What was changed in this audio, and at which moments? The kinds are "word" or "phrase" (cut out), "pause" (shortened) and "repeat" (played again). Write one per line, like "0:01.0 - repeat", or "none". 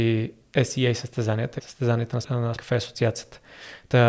0:01.6 - word
0:02.2 - word
0:02.6 - word